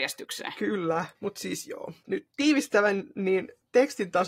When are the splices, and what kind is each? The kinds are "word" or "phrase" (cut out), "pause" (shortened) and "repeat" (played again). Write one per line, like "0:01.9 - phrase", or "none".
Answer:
0:02.3 - pause